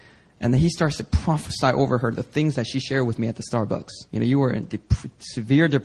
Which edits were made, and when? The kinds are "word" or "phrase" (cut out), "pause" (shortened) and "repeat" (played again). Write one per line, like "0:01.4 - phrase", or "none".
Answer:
0:04.1 - pause